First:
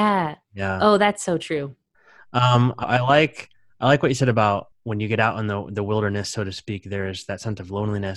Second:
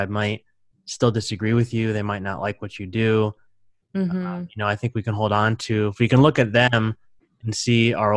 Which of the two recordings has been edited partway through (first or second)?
first